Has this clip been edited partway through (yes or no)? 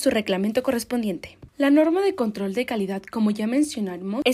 no